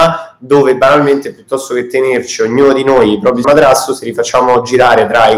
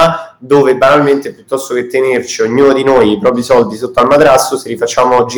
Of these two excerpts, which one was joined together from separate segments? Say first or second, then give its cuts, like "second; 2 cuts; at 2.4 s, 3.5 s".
first; 1 cut; at 3.4 s